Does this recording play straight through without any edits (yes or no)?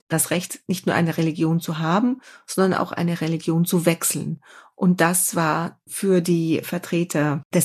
yes